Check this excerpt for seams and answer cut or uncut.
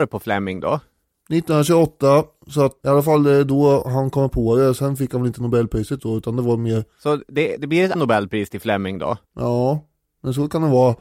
cut